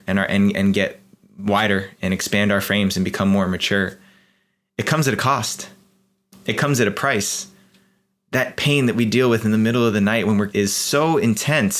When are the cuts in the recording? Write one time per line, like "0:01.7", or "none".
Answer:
0:10.5